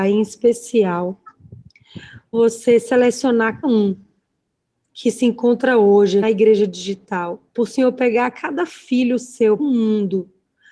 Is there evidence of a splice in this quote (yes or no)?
yes